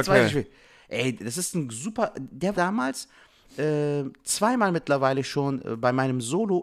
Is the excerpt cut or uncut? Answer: cut